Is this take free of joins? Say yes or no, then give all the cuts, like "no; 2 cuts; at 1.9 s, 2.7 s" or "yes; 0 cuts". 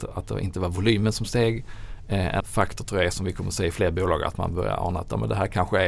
no; 1 cut; at 2.4 s